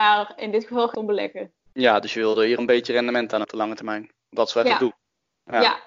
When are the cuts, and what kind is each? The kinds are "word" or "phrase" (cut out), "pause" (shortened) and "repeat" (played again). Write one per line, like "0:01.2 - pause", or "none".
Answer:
0:00.9 - phrase
0:01.7 - pause
0:02.6 - phrase
0:03.4 - word